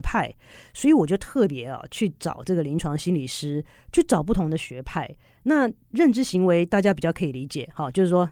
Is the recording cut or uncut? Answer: uncut